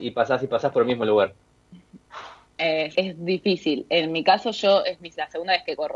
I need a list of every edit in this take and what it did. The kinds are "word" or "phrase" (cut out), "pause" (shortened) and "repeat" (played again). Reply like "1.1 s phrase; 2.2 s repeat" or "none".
2.9 s phrase